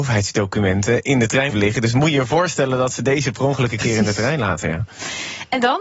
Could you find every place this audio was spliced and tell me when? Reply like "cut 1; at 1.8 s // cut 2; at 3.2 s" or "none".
cut 1; at 1.5 s